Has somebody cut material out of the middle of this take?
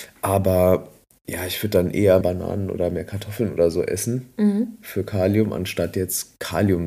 yes; 1 cut; at 2.2 s

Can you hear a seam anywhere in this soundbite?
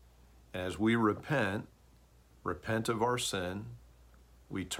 no; 0 cuts

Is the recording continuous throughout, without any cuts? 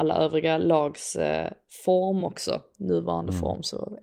yes; 0 cuts

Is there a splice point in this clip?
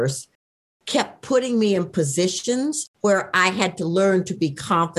yes; 1 cut; at 2.9 s

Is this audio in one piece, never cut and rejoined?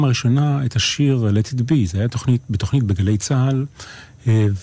yes; 0 cuts

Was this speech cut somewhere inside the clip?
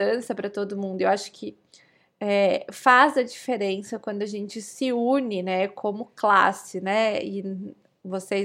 no; 0 cuts

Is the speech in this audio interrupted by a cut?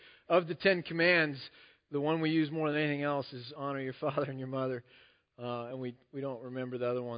no; 0 cuts

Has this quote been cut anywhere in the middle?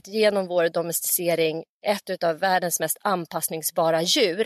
no; 0 cuts

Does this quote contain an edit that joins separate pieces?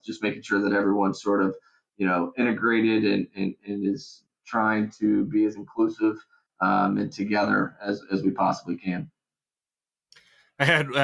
no; 0 cuts

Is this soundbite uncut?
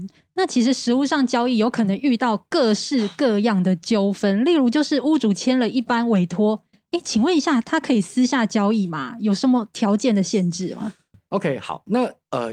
yes; 0 cuts

